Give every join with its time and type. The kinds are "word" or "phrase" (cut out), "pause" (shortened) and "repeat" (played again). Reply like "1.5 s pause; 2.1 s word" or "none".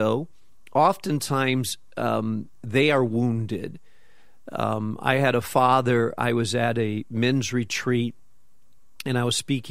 none